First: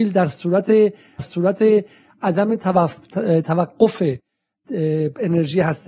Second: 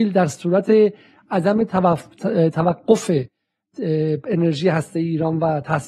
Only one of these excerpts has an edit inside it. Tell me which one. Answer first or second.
first